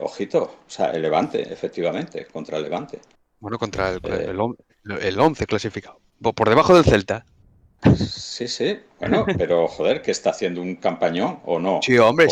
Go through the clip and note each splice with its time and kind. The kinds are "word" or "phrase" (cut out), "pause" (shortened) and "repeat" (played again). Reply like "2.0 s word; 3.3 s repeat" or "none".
none